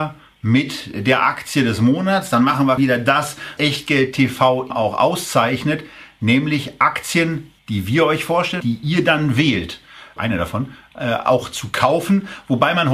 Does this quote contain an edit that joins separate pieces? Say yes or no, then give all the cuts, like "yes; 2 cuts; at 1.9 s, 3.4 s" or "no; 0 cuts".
yes; 6 cuts; at 2.8 s, 3.6 s, 4.7 s, 7.6 s, 8.6 s, 10.2 s